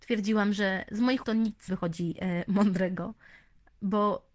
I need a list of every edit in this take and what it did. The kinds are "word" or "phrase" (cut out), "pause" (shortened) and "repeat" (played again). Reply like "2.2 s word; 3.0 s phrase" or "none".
1.2 s word; 1.7 s word